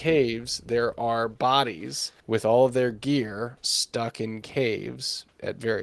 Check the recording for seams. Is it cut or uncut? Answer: cut